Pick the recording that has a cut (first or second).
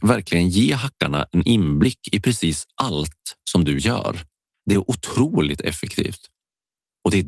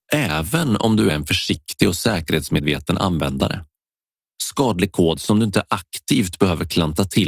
first